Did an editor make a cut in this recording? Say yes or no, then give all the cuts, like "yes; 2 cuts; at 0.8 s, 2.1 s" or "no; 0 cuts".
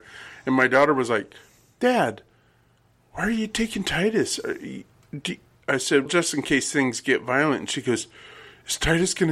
yes; 1 cut; at 6.1 s